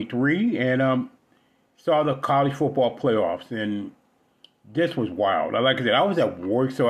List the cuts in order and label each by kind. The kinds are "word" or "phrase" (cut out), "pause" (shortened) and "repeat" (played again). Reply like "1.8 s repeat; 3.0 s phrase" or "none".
none